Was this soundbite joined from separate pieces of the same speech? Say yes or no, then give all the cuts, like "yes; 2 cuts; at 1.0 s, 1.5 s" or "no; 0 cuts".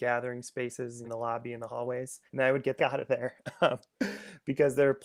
yes; 3 cuts; at 1.0 s, 2.3 s, 2.8 s